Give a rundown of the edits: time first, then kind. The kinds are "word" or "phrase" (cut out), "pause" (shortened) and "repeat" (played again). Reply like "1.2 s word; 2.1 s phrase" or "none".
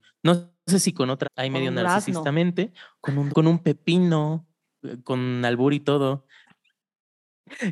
1.2 s word; 3.3 s word; 6.4 s word